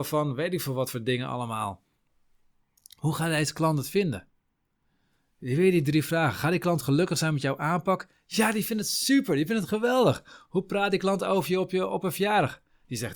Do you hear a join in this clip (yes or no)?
no